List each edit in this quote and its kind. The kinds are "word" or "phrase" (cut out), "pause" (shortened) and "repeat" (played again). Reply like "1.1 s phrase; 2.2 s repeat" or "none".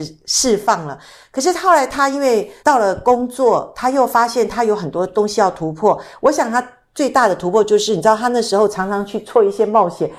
2.6 s pause